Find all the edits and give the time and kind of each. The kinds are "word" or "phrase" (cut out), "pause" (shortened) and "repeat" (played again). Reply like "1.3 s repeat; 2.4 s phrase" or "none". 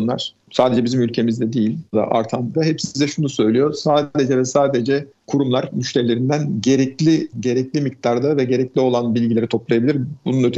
1.9 s word; 2.5 s word; 7.3 s word